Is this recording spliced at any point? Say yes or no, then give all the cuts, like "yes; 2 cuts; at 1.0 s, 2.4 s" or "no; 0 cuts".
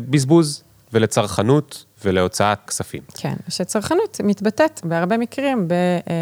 yes; 3 cuts; at 2.7 s, 3.1 s, 4.8 s